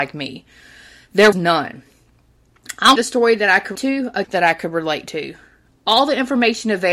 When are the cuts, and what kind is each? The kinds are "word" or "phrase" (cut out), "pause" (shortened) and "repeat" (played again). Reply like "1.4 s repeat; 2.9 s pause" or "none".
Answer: 1.3 s word; 3.0 s word; 3.8 s word; 4.2 s word

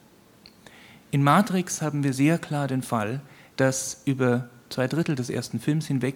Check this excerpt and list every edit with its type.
none

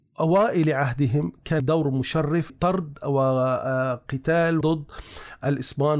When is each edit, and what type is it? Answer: 1.6 s word; 2.5 s word; 4.6 s word

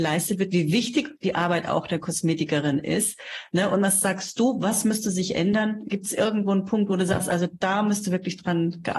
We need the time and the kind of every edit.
none

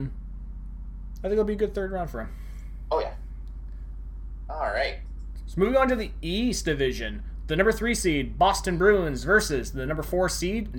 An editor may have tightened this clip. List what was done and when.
none

